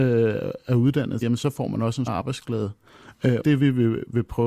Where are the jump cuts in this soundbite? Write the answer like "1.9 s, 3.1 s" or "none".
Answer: 1.2 s, 2.1 s, 3.4 s

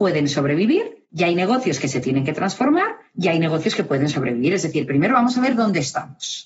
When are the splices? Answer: 1.0 s, 3.1 s

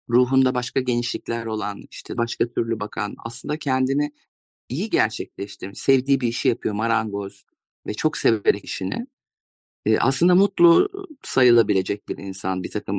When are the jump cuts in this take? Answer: 2.2 s, 8.6 s

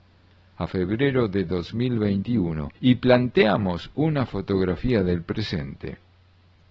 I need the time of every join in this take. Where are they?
2.7 s

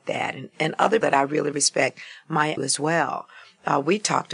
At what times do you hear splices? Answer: 1.0 s, 2.6 s

